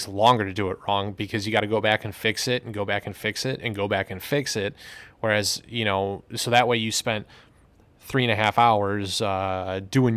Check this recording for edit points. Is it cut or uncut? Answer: uncut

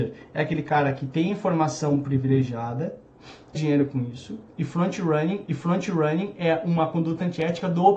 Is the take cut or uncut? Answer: cut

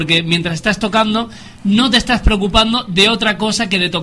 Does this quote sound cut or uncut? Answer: uncut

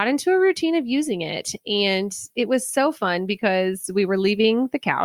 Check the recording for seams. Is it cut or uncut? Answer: uncut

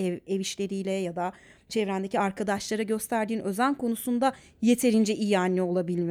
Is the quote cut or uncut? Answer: uncut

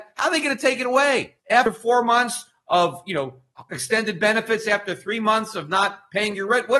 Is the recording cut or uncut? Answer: cut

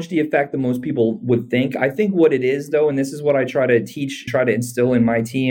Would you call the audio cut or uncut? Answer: cut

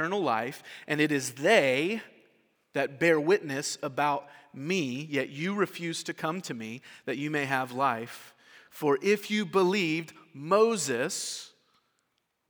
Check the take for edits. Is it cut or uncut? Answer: uncut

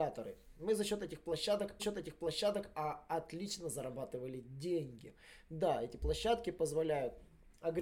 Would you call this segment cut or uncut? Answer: cut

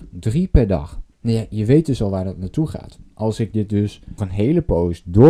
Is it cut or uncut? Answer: cut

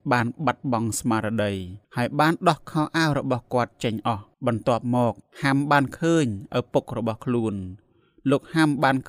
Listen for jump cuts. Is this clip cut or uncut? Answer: cut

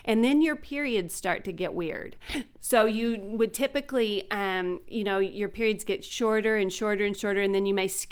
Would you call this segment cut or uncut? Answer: uncut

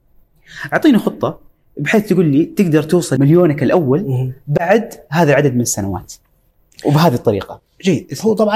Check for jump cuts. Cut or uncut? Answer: uncut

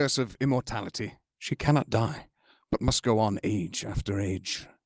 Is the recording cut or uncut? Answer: uncut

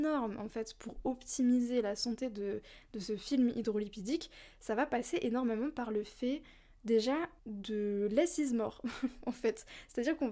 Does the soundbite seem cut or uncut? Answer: cut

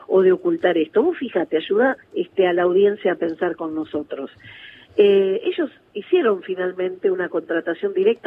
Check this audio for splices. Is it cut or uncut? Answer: cut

